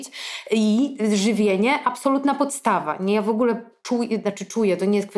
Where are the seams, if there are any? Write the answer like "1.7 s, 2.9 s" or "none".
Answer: none